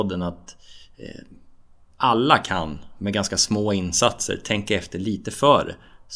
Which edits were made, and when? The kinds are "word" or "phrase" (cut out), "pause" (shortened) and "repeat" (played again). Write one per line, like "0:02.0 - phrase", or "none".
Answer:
none

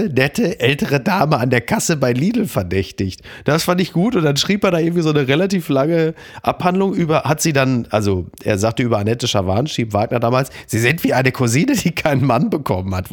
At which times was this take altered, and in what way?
none

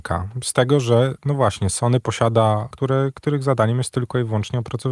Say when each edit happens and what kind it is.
0:02.7 - phrase

